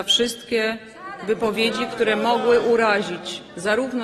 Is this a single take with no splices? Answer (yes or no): yes